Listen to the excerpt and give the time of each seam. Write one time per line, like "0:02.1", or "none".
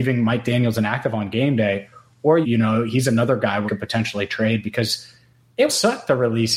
0:02.4
0:03.7
0:05.7